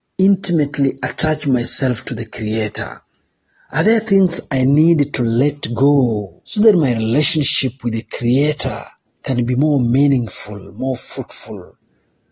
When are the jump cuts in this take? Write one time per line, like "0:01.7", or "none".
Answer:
0:03.2
0:06.4
0:09.1